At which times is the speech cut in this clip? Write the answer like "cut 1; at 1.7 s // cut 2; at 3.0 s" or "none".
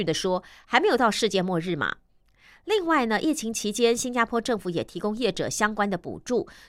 none